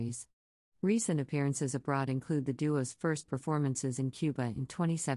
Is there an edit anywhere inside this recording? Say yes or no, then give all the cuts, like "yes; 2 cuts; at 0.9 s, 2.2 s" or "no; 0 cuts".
no; 0 cuts